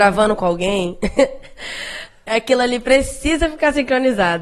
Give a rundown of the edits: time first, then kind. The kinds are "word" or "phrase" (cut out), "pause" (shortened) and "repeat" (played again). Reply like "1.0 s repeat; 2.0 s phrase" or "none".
none